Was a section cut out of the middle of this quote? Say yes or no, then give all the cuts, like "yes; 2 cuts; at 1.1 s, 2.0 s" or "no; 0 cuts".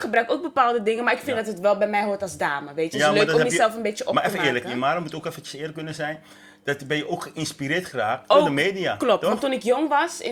no; 0 cuts